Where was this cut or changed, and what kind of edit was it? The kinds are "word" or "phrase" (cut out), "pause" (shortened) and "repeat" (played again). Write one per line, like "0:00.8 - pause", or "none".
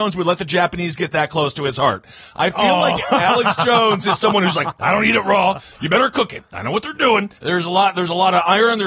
0:07.4 - pause